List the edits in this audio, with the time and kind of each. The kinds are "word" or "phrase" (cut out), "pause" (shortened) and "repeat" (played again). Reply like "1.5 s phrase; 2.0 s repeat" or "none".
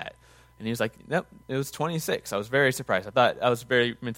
1.0 s pause